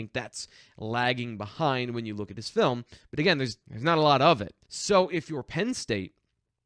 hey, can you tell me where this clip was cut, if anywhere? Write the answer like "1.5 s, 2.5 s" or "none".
3.6 s, 4.6 s